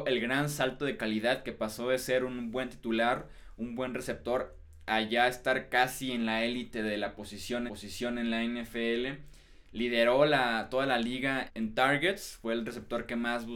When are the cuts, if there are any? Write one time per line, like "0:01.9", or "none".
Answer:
0:07.7
0:11.5